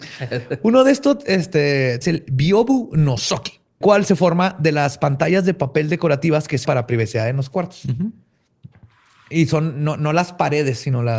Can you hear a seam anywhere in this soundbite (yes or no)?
yes